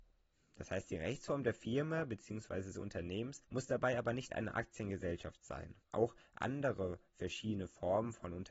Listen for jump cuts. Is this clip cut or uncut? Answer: cut